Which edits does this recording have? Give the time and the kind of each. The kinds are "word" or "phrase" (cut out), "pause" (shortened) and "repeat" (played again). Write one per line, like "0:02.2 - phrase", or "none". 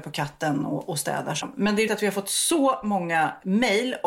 0:01.4 - word
0:01.9 - word